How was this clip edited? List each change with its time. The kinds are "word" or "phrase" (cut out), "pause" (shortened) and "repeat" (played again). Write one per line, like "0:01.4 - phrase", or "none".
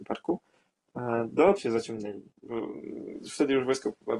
0:01.6 - phrase